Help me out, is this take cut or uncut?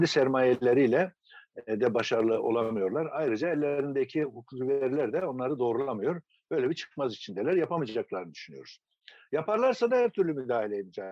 uncut